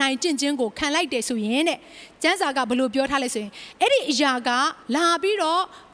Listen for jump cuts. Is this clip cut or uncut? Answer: cut